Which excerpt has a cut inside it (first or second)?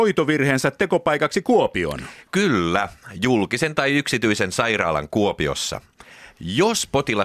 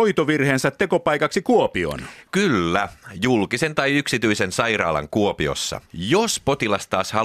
second